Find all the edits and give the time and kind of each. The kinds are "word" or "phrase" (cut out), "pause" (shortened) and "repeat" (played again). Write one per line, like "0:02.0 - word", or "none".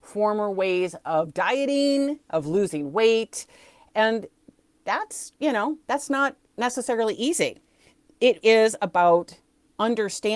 0:08.4 - word